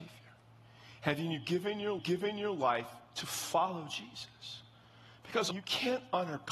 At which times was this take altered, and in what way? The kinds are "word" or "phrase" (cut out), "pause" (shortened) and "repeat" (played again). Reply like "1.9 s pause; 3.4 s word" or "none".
2.0 s repeat; 5.5 s word